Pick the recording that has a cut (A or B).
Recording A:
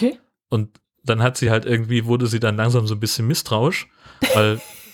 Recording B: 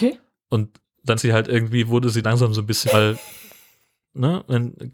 B